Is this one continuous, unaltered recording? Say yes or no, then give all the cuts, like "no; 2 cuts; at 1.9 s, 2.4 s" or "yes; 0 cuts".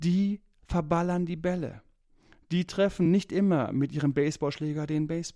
yes; 0 cuts